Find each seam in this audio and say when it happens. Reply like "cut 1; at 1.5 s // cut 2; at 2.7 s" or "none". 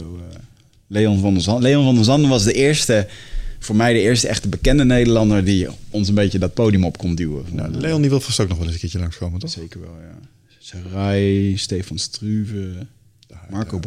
none